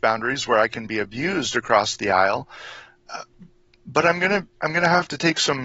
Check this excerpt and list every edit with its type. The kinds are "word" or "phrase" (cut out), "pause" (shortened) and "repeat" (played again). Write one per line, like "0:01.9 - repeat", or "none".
none